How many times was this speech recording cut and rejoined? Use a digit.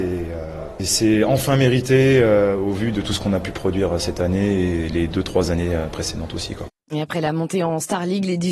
0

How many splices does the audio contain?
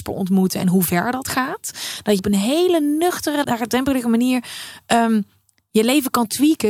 2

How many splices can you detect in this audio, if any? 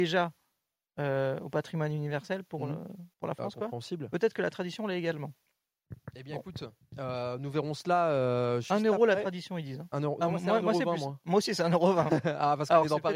1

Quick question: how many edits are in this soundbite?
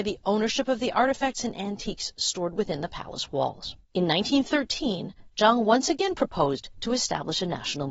1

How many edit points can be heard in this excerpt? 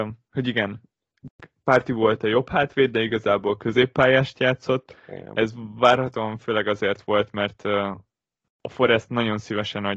0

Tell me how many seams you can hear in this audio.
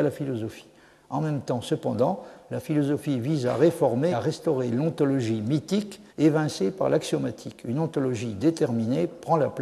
2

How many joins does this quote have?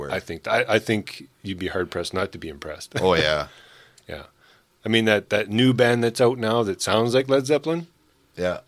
0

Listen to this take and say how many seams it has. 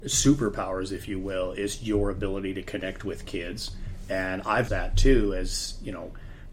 1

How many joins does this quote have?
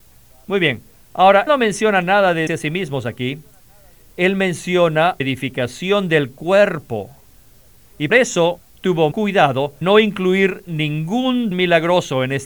7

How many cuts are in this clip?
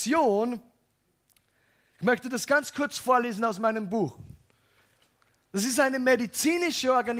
0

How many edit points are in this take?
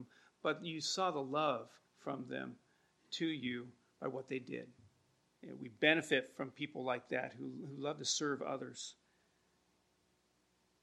1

